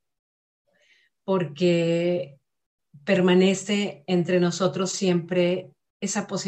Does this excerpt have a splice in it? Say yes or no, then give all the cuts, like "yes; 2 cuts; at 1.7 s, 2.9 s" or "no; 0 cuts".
no; 0 cuts